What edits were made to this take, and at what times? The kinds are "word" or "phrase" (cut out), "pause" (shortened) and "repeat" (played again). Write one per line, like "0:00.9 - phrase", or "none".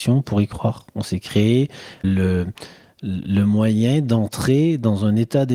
0:02.0 - word